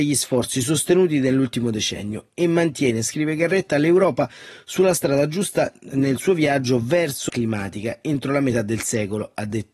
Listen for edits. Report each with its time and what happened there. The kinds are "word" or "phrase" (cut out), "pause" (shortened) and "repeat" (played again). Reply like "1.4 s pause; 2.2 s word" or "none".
7.3 s phrase